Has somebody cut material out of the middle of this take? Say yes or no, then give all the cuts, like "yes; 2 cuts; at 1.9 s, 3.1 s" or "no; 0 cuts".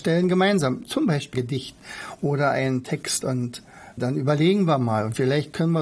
yes; 3 cuts; at 1.3 s, 3.2 s, 4.0 s